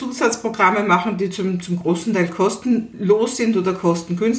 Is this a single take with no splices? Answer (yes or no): yes